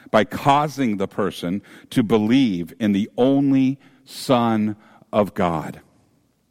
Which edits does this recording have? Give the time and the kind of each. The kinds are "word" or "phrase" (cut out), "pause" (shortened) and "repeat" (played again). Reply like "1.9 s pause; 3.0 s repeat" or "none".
none